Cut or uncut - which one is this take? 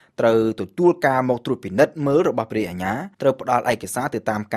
cut